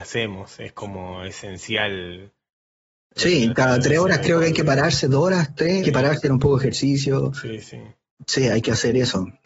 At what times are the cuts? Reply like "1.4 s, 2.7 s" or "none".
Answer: 5.8 s, 6.2 s